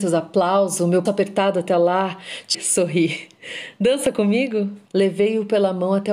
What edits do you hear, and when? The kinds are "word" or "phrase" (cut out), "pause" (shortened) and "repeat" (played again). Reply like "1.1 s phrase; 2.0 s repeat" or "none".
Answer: 1.1 s word; 2.5 s word; 4.9 s pause